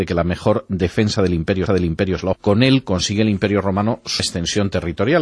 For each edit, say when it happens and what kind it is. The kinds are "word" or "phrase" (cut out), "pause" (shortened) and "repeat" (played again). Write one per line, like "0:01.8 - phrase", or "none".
0:01.7 - repeat
0:02.3 - phrase
0:04.2 - word